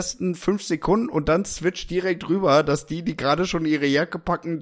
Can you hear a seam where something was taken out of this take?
no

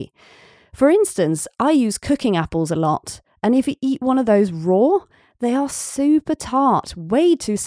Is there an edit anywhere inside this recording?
no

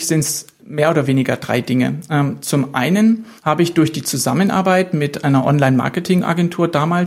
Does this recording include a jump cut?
yes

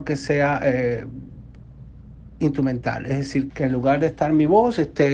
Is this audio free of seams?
no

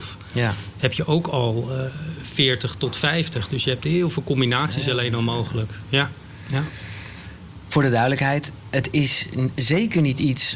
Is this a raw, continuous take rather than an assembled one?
yes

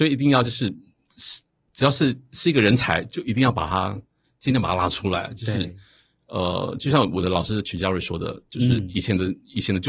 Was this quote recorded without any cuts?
yes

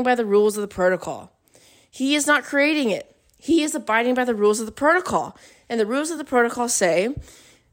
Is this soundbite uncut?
yes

